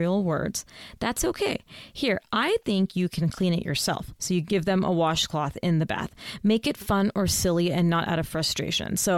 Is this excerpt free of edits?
yes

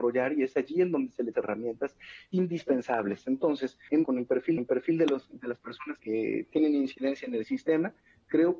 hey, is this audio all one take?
no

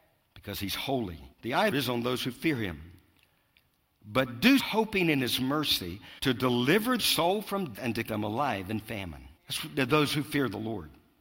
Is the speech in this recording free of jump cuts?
no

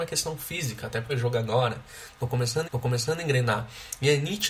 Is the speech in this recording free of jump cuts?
no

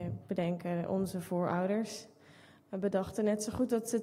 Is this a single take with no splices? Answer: yes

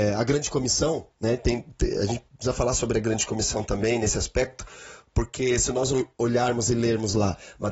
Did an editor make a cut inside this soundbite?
yes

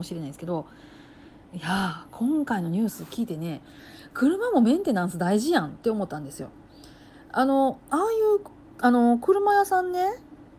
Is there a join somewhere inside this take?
no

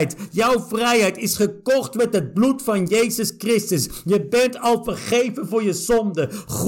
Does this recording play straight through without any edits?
yes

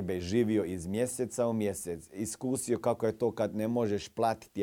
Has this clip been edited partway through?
no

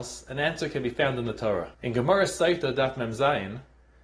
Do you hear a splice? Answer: yes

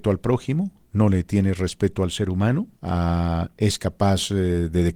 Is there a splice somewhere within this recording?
yes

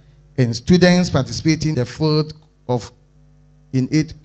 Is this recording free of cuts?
no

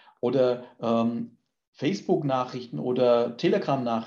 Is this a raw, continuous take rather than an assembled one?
yes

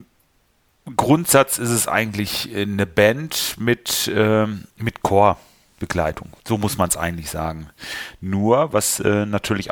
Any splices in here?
yes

